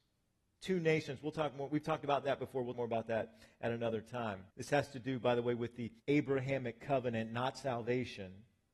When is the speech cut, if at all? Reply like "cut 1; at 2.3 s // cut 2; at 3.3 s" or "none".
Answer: cut 1; at 2.7 s // cut 2; at 4.5 s // cut 3; at 6.0 s